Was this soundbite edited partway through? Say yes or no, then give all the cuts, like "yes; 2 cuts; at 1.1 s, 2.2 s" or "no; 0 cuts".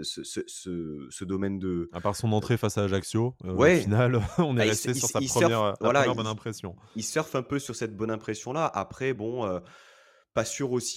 no; 0 cuts